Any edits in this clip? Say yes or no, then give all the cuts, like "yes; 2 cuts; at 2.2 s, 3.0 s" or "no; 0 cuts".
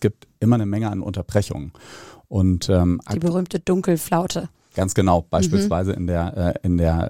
no; 0 cuts